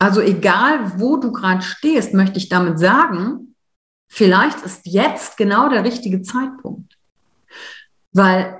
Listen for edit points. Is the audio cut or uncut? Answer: uncut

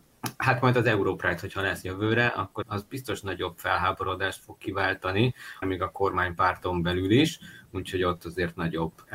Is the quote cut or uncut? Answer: cut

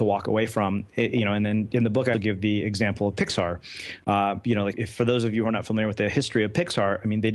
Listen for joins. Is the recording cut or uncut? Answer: cut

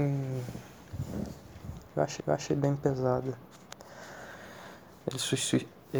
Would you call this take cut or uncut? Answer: cut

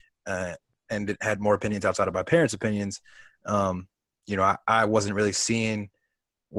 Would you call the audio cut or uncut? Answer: uncut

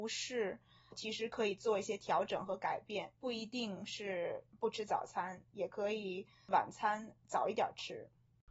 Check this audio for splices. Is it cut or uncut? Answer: cut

